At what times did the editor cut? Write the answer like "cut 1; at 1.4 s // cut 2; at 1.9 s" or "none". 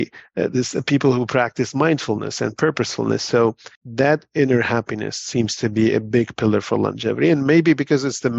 cut 1; at 3.7 s